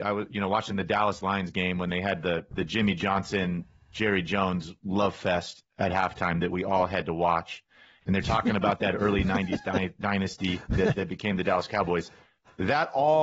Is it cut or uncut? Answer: uncut